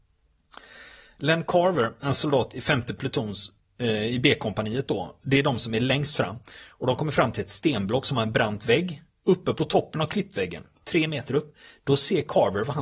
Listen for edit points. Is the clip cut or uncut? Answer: uncut